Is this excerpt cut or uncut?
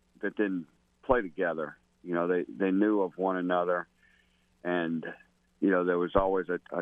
uncut